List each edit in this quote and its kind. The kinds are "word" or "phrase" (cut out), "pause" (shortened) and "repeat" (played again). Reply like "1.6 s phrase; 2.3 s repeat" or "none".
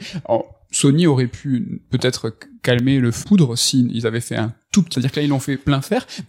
3.2 s word; 4.9 s word